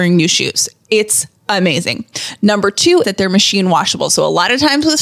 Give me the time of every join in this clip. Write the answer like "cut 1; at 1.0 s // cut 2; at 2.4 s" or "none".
cut 1; at 1.4 s // cut 2; at 3.0 s